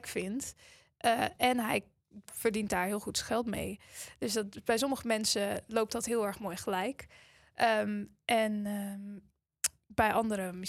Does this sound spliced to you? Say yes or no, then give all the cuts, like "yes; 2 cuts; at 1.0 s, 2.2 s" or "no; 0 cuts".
no; 0 cuts